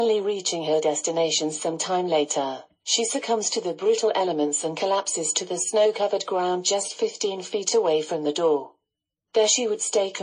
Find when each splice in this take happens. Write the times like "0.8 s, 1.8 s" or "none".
none